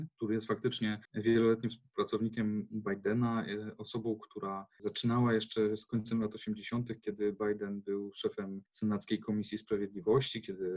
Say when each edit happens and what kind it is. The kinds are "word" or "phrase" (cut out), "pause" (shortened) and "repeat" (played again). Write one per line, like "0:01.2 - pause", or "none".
0:01.0 - pause